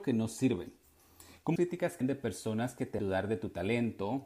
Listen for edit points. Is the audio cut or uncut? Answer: cut